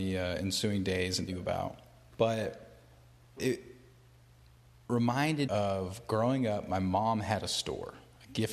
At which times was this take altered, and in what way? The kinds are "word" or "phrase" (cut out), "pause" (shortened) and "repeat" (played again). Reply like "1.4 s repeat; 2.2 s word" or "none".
1.3 s word; 3.4 s word; 5.5 s word

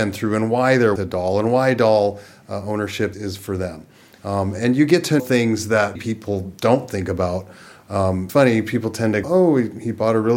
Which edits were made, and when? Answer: 1.0 s word; 3.1 s word; 5.2 s word; 6.0 s word; 8.3 s word; 9.2 s word

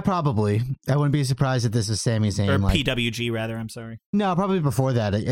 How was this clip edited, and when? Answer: none

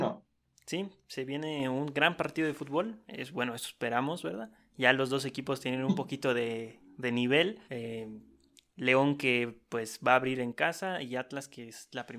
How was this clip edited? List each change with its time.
7.7 s pause

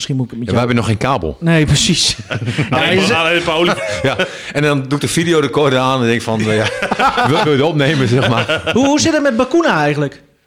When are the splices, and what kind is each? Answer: 3.8 s word; 7.4 s phrase

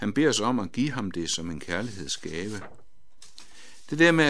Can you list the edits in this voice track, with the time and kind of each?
none

